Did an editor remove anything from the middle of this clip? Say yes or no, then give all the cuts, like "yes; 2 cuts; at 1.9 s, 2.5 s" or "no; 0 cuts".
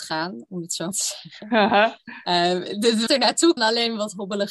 yes; 3 cuts; at 0.9 s, 3.1 s, 3.6 s